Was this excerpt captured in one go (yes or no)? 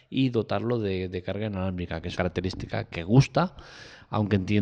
no